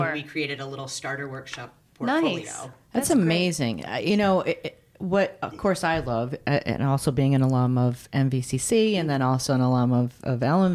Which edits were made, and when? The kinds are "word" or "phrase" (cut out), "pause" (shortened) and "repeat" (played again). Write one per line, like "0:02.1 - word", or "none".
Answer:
none